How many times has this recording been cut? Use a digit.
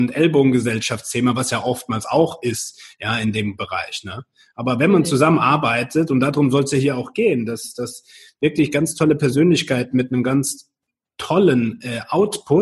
0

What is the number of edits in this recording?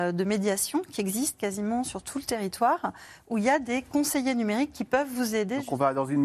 0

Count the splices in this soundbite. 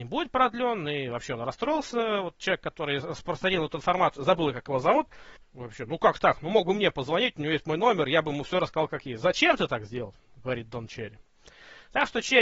1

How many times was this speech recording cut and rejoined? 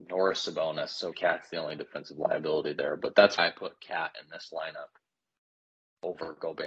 2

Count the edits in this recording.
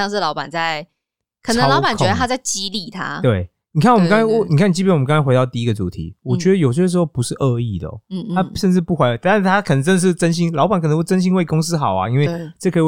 0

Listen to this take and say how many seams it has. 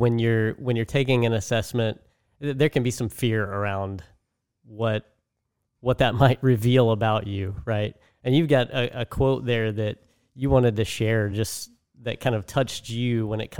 0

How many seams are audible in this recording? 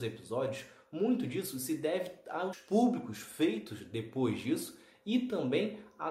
1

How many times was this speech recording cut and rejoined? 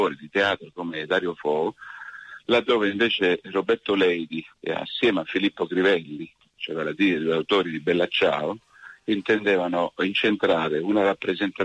0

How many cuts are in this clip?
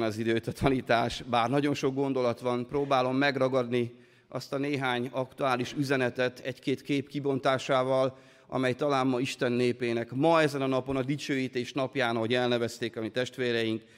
0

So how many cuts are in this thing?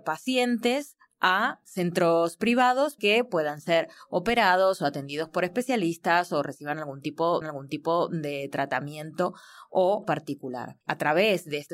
4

